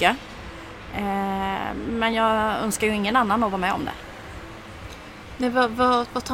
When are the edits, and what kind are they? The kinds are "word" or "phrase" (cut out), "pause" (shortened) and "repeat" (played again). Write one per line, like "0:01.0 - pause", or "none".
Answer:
none